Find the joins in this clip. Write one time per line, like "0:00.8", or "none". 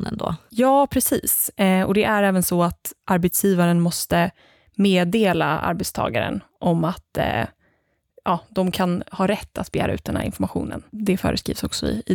none